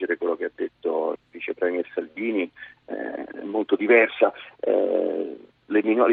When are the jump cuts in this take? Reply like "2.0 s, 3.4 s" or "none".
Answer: 1.2 s